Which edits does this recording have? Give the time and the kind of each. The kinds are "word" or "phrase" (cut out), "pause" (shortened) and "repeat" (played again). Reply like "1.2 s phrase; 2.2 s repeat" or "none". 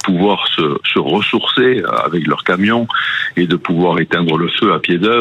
none